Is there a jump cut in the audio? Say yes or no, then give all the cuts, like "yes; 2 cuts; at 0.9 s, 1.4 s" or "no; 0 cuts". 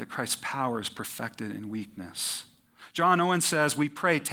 no; 0 cuts